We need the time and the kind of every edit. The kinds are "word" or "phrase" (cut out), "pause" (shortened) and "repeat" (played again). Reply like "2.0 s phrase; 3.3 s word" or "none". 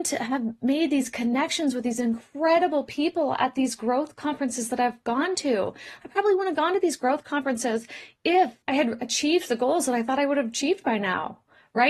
8.6 s pause